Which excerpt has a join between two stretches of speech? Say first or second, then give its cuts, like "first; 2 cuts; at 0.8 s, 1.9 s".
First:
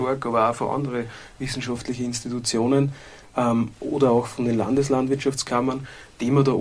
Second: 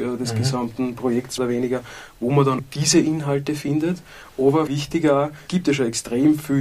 second; 4 cuts; at 1.4 s, 2.6 s, 4.7 s, 5.5 s